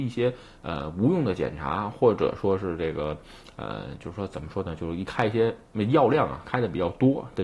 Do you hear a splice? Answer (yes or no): no